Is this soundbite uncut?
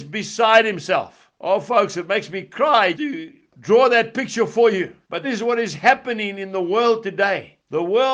no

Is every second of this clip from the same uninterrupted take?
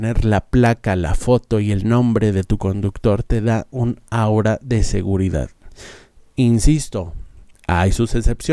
yes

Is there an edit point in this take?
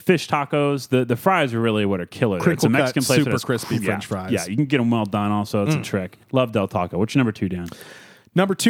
yes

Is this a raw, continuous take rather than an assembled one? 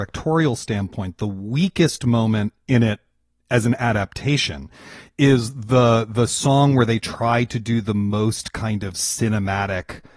yes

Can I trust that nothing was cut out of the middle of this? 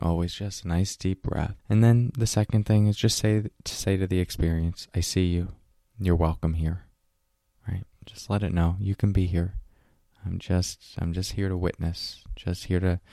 no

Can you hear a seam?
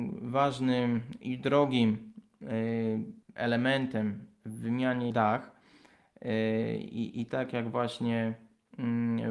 yes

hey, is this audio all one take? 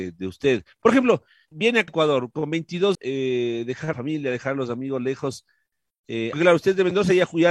no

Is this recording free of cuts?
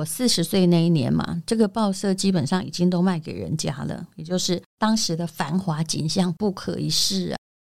no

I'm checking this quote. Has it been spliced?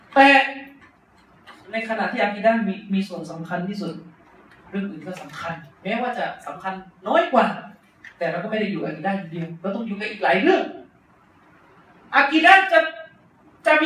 yes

